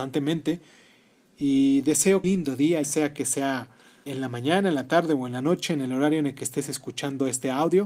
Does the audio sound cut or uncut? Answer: cut